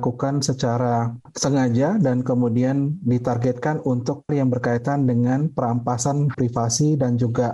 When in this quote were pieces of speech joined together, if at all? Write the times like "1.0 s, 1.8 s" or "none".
4.3 s, 6.3 s